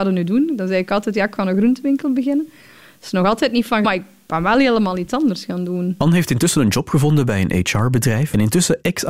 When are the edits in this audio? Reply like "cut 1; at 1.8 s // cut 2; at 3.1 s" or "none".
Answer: cut 1; at 3.8 s